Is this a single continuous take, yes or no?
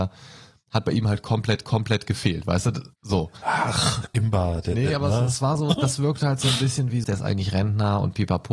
no